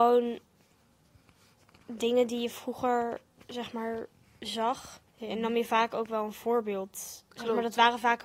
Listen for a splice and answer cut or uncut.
cut